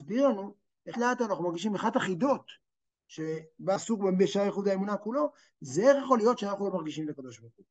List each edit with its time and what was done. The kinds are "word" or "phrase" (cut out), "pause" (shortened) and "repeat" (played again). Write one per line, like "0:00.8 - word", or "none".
0:00.9 - word
0:03.8 - word